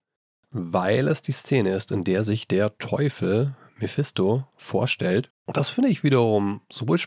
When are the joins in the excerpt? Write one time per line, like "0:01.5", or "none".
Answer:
0:05.4